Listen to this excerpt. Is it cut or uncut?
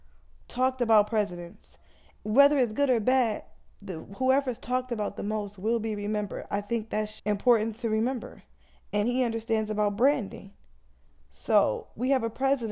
cut